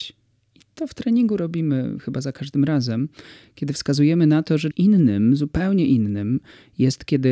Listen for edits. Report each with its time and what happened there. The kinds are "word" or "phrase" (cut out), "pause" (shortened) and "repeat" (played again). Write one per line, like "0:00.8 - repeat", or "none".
0:04.7 - word